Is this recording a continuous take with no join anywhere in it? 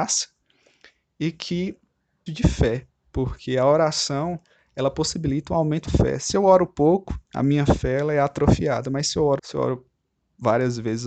no; 4 cuts; at 2.3 s, 5.9 s, 7.3 s, 9.4 s

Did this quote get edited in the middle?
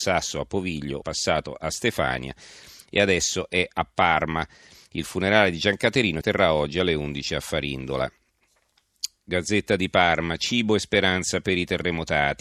yes; 2 cuts; at 1.0 s, 6.2 s

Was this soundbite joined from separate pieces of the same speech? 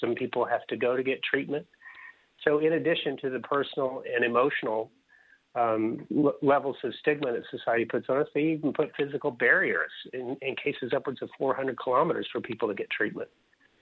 no; 0 cuts

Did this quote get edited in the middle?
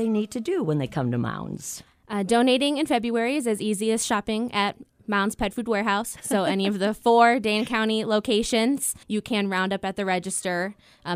yes; 1 cut; at 9.0 s

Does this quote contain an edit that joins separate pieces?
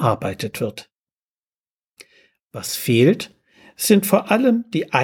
no; 0 cuts

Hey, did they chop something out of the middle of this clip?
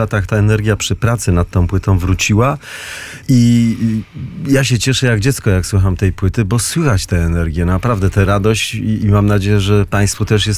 yes; 1 cut; at 3.2 s

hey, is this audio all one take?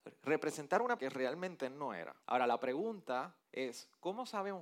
no; 3 cuts; at 1.0 s, 2.2 s, 3.4 s

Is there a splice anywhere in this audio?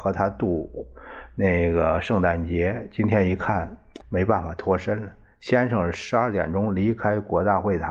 yes; 1 cut; at 4.0 s

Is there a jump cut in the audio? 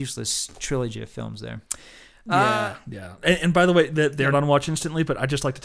yes; 2 cuts; at 1.7 s, 4.3 s

